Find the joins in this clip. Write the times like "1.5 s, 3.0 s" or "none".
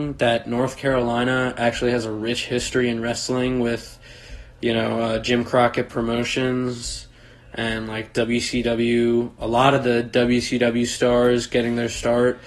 none